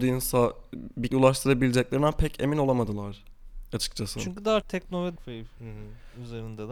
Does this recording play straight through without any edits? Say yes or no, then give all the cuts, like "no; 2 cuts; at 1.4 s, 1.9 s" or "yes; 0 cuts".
no; 3 cuts; at 1.1 s, 4.6 s, 5.2 s